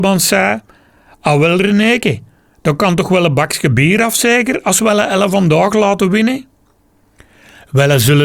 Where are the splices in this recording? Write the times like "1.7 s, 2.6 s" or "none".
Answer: none